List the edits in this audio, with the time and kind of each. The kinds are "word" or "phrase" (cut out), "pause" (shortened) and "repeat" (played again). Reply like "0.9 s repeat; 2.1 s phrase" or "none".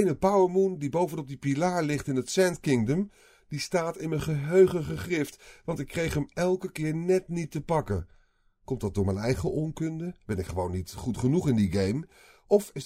none